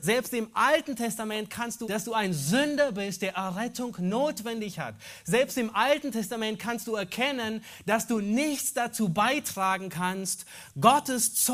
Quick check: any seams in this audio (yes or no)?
yes